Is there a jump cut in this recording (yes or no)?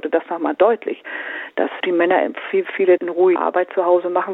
yes